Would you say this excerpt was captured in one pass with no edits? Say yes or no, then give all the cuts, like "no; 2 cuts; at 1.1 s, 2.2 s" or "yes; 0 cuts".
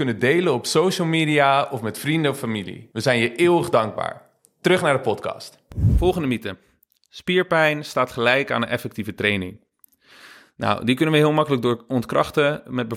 yes; 0 cuts